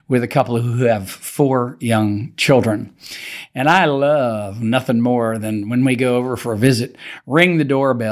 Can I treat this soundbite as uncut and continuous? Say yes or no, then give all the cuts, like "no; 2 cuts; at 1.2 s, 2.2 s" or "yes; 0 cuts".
yes; 0 cuts